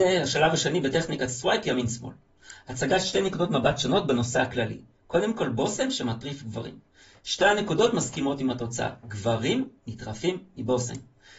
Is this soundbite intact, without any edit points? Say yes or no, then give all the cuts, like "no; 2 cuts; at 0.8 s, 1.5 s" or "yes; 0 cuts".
yes; 0 cuts